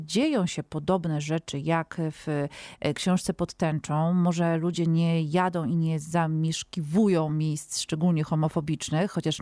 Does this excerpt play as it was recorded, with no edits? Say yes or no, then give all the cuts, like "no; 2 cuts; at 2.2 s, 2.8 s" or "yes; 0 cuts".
yes; 0 cuts